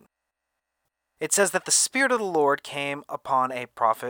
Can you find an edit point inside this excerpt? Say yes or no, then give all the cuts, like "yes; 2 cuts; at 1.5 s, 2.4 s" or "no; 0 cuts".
no; 0 cuts